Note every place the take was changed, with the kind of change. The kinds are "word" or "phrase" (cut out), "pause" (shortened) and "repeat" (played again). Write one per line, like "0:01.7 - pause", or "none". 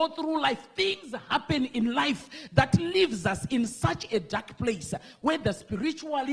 none